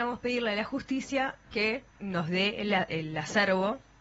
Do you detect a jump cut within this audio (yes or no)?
yes